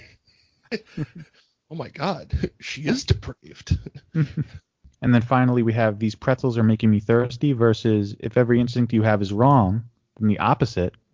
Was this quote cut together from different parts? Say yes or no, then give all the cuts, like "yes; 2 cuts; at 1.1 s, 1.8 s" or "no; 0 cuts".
no; 0 cuts